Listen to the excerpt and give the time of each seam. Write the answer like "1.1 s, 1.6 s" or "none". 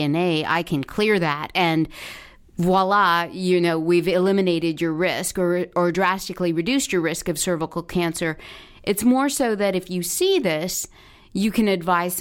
none